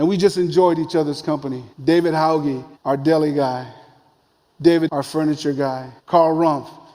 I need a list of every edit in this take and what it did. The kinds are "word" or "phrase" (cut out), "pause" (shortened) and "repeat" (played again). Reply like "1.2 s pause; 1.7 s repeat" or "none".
1.7 s pause; 2.8 s pause; 4.9 s word; 6.0 s pause